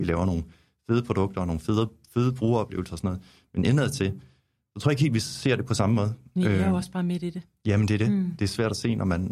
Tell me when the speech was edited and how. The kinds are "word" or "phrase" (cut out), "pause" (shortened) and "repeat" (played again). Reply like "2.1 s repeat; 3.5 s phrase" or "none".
none